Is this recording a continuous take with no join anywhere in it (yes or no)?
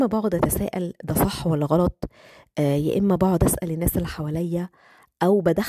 yes